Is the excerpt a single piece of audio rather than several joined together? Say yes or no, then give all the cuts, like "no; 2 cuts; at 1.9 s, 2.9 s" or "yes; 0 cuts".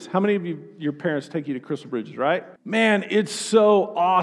no; 1 cut; at 2.6 s